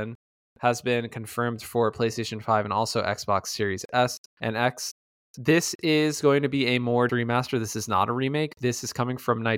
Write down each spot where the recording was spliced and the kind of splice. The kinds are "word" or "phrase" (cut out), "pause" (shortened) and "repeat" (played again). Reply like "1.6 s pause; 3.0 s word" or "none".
4.3 s pause; 5.2 s pause; 7.1 s phrase